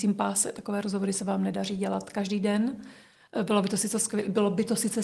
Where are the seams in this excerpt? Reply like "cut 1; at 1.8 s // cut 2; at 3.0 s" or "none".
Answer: none